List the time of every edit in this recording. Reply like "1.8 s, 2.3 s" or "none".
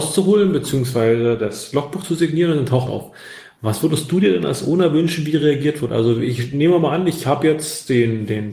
2.9 s